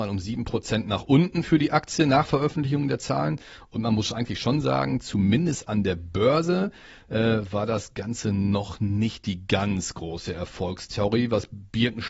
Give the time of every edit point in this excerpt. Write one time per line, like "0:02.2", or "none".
none